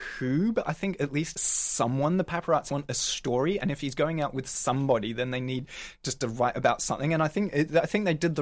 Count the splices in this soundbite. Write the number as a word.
two